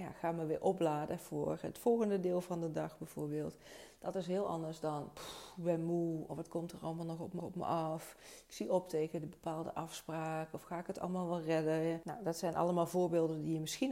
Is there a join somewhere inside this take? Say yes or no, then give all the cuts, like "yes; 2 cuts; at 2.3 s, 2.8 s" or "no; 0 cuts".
yes; 1 cut; at 7.4 s